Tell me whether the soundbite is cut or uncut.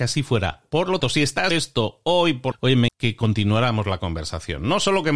cut